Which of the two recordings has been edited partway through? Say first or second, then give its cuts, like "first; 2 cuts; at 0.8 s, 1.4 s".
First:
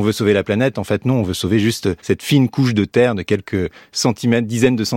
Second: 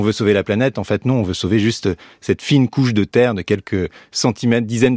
first; 1 cut; at 2.0 s